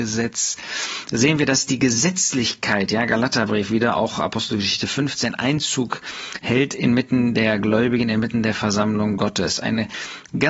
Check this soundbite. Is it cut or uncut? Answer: uncut